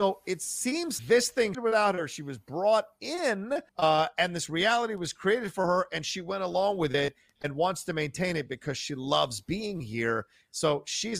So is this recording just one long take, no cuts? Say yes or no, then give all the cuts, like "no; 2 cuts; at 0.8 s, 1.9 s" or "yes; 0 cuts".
no; 3 cuts; at 1.0 s, 1.5 s, 3.7 s